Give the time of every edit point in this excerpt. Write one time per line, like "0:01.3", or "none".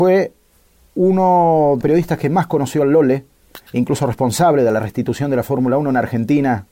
0:01.8
0:03.7